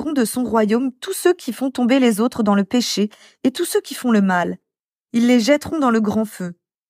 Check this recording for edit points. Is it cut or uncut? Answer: uncut